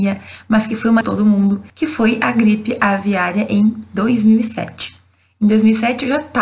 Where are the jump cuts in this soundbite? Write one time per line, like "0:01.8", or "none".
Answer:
0:01.0
0:01.7